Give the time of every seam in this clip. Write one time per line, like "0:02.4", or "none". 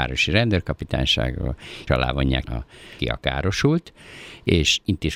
0:01.9
0:02.4
0:03.0